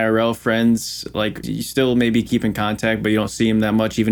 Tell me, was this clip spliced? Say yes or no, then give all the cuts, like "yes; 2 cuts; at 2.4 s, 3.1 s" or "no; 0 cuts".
yes; 1 cut; at 1.4 s